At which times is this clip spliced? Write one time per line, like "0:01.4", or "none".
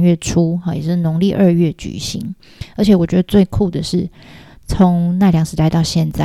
none